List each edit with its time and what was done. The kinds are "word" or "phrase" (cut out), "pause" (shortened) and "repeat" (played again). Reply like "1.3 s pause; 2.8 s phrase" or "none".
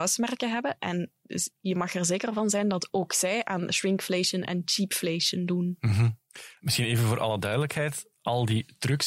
none